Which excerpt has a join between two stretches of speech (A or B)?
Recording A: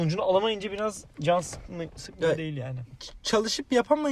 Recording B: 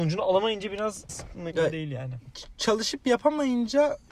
B